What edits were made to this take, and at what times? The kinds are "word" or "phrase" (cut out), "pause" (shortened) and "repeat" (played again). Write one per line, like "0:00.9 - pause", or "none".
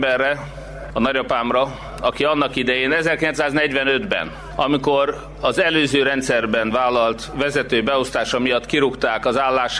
none